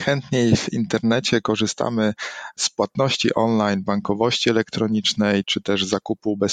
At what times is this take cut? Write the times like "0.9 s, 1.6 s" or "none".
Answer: 5.4 s